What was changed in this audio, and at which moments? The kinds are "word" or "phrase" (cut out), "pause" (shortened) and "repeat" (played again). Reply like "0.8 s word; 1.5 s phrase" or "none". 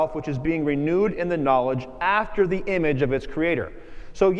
none